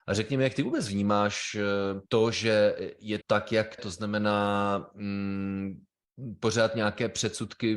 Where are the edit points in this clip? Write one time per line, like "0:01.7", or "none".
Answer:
0:02.1
0:03.2
0:03.8